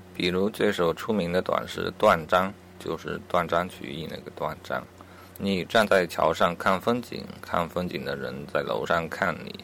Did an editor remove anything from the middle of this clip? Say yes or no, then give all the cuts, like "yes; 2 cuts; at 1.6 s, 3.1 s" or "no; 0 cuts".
yes; 1 cut; at 5.3 s